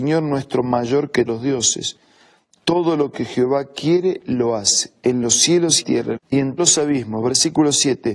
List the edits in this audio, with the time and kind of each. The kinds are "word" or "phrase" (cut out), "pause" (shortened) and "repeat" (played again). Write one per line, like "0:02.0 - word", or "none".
0:01.3 - word
0:05.8 - phrase
0:06.2 - phrase
0:06.6 - word